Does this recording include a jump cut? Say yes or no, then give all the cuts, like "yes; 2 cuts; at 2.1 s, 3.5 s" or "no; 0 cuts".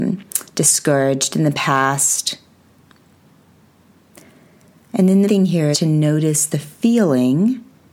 yes; 2 cuts; at 5.2 s, 5.7 s